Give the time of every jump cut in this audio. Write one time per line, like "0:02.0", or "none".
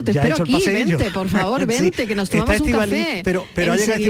none